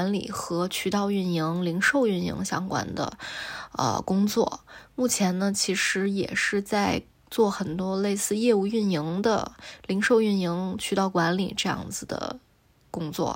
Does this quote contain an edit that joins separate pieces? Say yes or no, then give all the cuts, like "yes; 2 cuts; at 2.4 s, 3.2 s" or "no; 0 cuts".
no; 0 cuts